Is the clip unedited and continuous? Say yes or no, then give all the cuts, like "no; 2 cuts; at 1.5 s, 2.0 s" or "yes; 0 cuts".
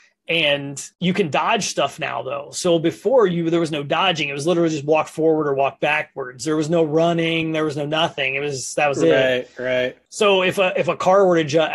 no; 2 cuts; at 0.9 s, 10.1 s